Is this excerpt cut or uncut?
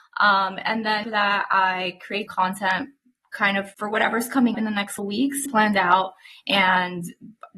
cut